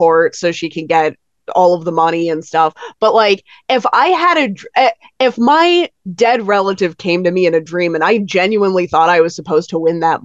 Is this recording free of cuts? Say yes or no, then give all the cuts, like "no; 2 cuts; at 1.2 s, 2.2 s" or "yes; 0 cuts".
yes; 0 cuts